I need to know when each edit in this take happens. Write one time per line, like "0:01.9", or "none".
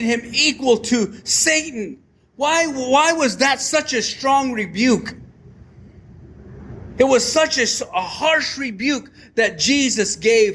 none